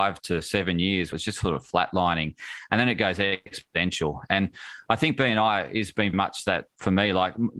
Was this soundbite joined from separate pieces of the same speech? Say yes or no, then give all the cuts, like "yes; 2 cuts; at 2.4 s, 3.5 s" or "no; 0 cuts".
yes; 2 cuts; at 1.1 s, 6.1 s